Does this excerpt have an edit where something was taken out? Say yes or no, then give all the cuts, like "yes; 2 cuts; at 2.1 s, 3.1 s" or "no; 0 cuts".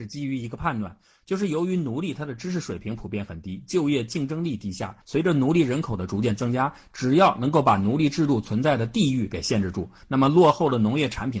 yes; 1 cut; at 5.0 s